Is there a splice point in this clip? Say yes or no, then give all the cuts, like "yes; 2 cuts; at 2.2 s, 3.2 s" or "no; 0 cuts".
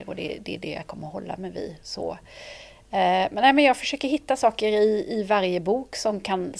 no; 0 cuts